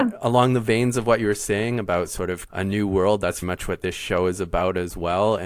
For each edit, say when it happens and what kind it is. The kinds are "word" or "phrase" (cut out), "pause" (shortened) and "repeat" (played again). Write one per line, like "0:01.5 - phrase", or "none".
0:02.5 - word
0:03.4 - word

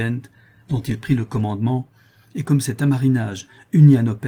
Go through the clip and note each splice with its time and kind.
none

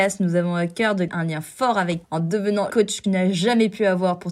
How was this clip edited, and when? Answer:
0:01.1 - word
0:02.0 - word
0:02.7 - word
0:03.0 - word

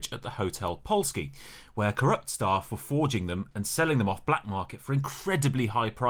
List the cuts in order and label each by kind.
none

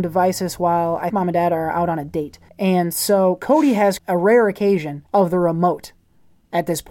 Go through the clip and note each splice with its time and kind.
0:01.1 - word
0:02.5 - pause
0:04.0 - word
0:05.1 - pause

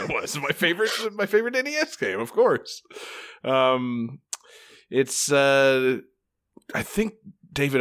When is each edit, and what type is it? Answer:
none

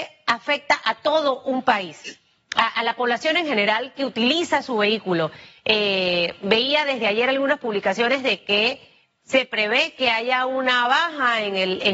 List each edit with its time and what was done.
none

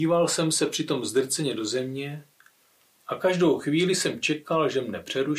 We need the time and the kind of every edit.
none

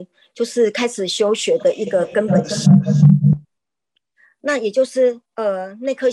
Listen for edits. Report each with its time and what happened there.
0:03.4 - pause
0:05.2 - pause

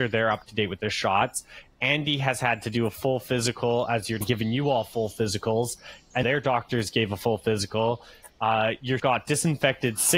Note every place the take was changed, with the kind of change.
0:04.2 - phrase
0:06.2 - word
0:09.0 - word

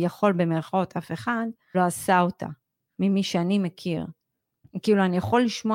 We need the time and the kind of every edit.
0:01.7 - word

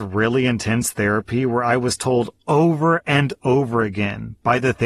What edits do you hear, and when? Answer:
none

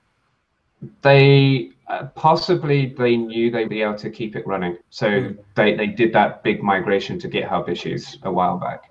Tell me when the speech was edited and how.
0:03.7 - word
0:04.8 - pause

